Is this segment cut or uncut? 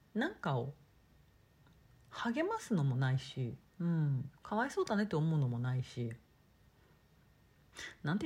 cut